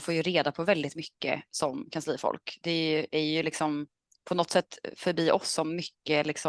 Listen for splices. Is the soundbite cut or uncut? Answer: uncut